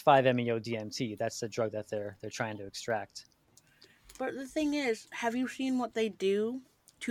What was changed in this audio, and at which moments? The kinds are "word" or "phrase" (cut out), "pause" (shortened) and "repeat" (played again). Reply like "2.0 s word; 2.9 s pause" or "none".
none